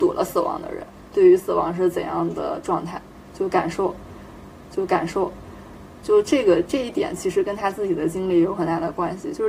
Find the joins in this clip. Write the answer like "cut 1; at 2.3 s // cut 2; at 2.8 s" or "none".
cut 1; at 4.6 s